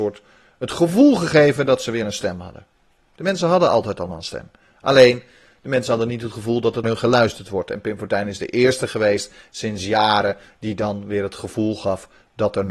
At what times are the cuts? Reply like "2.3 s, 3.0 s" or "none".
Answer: 6.8 s

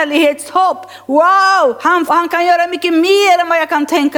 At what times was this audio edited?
2.1 s

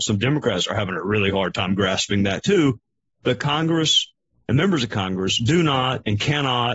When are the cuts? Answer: none

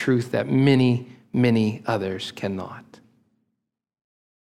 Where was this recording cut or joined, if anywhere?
none

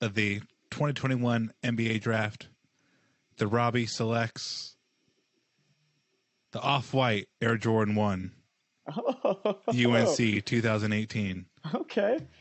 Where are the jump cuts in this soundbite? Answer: none

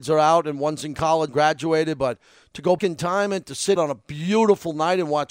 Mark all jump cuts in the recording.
1.3 s, 2.8 s, 3.8 s

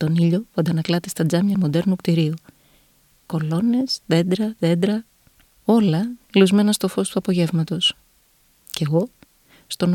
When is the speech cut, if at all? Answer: 1.5 s, 3.1 s, 4.6 s, 5.4 s

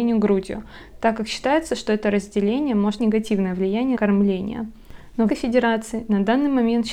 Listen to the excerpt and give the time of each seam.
3.0 s, 4.0 s, 5.3 s

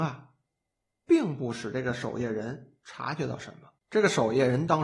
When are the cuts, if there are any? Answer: 3.8 s

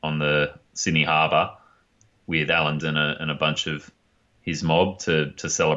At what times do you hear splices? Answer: 2.8 s

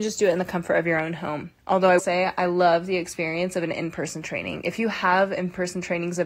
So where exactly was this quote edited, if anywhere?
1.6 s, 2.0 s

